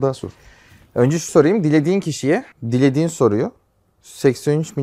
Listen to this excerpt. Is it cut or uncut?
cut